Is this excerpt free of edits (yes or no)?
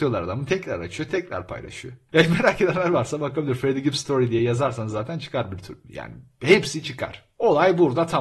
yes